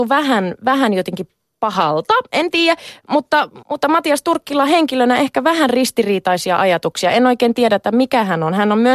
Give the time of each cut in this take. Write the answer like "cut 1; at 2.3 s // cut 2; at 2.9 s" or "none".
cut 1; at 3.6 s